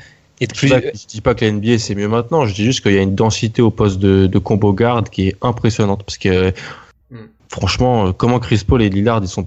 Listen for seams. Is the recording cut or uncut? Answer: uncut